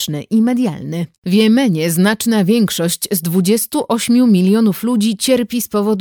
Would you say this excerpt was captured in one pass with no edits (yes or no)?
no